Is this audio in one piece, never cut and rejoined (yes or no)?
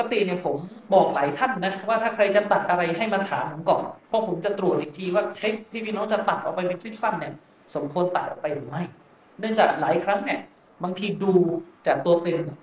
no